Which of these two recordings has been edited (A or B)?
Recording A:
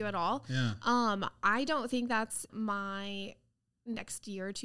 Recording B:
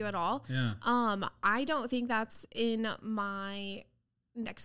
A